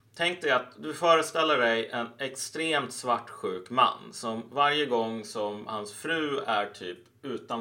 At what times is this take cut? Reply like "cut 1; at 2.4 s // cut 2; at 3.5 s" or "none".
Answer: none

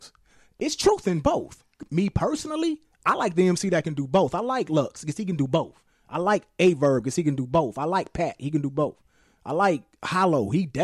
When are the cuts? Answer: none

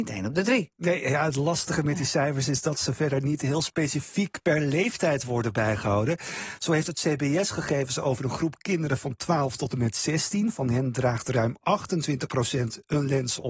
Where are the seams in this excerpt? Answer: none

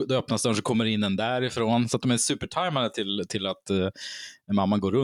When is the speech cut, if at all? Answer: none

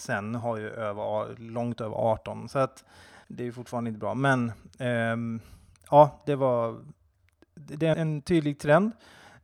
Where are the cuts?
cut 1; at 3.2 s // cut 2; at 7.9 s

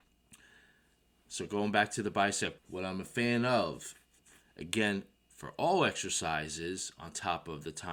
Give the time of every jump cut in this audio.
cut 1; at 2.6 s

